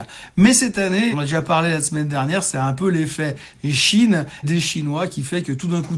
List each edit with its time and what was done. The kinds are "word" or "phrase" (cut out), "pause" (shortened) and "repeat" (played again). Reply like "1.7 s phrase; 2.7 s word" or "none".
1.1 s word; 4.4 s phrase